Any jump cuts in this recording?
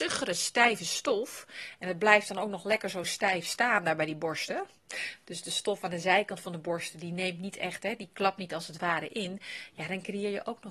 no; 0 cuts

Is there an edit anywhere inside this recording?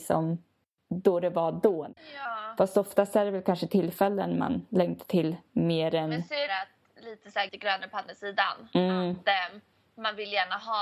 yes; 2 cuts; at 6.5 s, 7.5 s

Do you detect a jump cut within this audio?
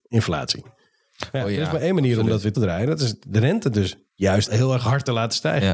yes; 2 cuts; at 2.5 s, 4.5 s

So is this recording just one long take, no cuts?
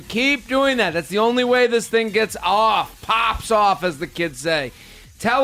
yes; 0 cuts

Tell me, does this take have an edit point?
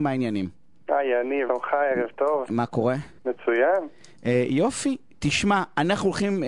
yes; 2 cuts; at 1.5 s, 3.2 s

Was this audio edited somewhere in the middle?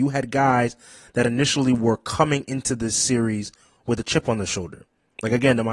no; 0 cuts

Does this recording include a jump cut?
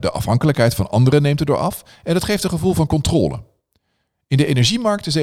no; 0 cuts

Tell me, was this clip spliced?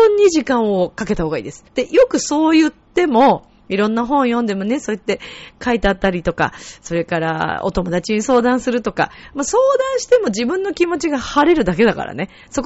yes; 1 cut; at 1.7 s

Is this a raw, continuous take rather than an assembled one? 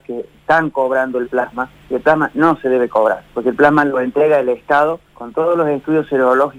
no; 2 cuts; at 1.8 s, 5.1 s

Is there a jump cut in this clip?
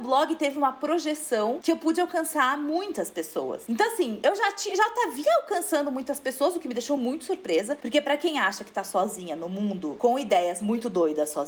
no; 0 cuts

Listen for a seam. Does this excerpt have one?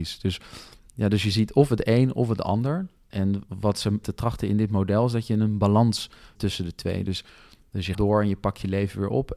yes; 3 cuts; at 4.0 s, 6.4 s, 7.9 s

